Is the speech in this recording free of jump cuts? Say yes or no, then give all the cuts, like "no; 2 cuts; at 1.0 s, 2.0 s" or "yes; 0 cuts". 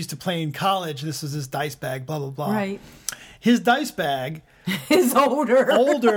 yes; 0 cuts